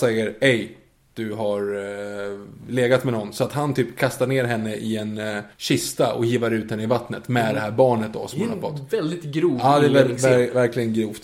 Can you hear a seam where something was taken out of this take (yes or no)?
yes